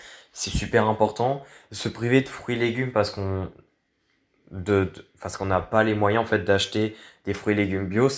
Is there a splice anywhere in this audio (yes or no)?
no